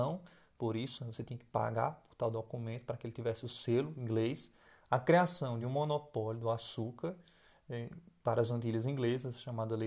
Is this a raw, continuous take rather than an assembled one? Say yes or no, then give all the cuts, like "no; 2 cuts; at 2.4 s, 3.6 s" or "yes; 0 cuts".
yes; 0 cuts